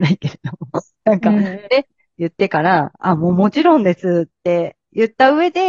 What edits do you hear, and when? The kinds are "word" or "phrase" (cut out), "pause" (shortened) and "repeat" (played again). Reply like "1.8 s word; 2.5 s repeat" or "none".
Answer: none